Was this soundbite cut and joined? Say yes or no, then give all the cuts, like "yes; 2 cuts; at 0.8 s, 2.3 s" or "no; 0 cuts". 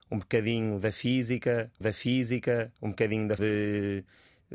yes; 2 cuts; at 1.8 s, 3.4 s